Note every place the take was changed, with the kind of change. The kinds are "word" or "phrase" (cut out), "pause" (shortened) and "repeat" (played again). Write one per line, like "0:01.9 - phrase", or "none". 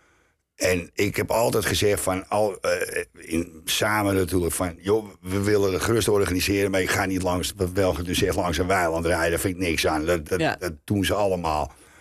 0:10.2 - word